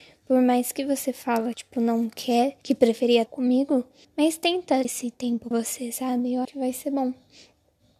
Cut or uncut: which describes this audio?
cut